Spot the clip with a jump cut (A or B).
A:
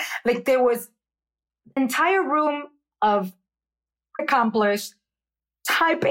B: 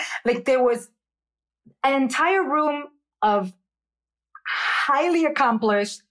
A